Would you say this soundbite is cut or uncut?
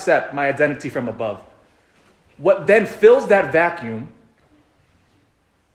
uncut